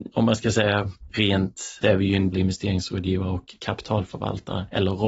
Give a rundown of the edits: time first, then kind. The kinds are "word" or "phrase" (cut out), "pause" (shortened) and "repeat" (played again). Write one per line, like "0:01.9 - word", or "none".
0:01.8 - phrase
0:02.3 - word